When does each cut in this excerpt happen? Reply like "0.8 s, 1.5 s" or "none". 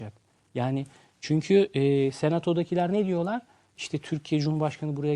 none